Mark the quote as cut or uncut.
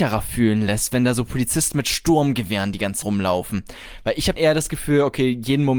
cut